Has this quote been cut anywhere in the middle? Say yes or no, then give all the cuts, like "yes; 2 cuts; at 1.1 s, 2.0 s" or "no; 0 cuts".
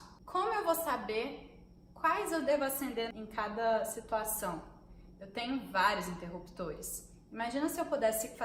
no; 0 cuts